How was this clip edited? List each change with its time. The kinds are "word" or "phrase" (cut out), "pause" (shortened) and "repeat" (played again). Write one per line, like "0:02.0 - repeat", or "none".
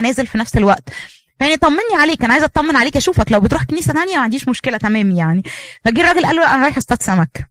none